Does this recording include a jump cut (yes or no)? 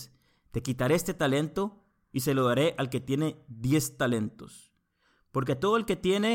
no